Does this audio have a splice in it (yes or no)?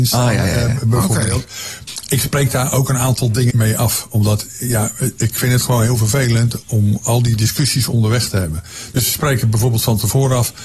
yes